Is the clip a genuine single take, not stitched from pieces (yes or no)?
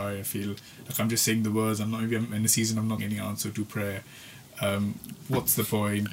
no